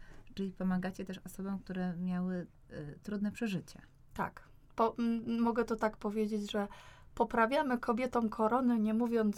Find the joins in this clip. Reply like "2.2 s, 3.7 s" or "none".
none